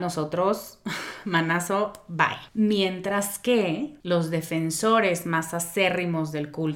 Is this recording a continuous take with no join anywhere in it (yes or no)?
no